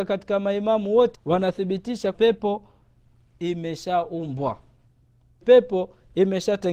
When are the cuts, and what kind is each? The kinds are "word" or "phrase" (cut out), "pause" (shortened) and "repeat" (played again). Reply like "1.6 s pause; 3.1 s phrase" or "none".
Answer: 1.1 s word; 2.1 s word; 5.4 s word